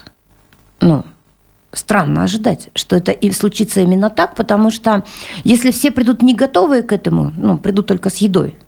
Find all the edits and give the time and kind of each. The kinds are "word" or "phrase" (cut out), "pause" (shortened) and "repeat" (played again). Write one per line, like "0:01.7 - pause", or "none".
none